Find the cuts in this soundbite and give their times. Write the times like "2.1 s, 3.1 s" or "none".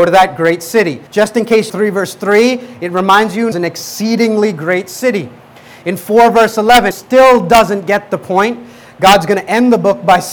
1.1 s, 1.7 s, 3.5 s, 6.9 s